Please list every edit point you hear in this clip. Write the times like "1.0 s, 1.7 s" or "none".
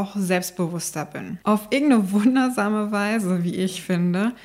none